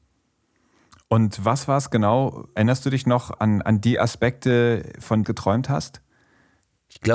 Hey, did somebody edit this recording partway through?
yes; 1 cut; at 5.2 s

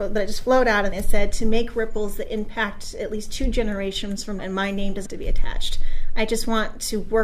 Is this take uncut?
no; 3 cuts; at 0.9 s, 4.4 s, 5.1 s

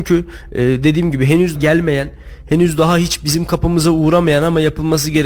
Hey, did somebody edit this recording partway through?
yes; 1 cut; at 1.6 s

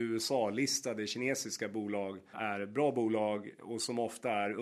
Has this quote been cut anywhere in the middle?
yes; 1 cut; at 2.3 s

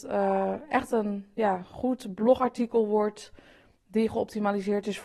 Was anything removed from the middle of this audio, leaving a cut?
no; 0 cuts

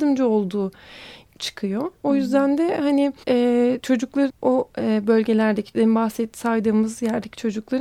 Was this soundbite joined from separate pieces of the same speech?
yes; 4 cuts; at 1.3 s, 3.2 s, 4.3 s, 5.7 s

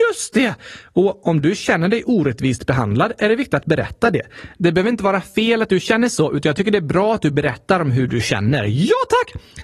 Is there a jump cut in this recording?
no; 0 cuts

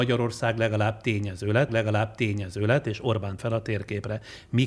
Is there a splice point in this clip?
yes; 2 cuts; at 1.7 s, 3.4 s

